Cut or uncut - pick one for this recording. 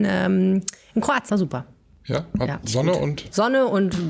cut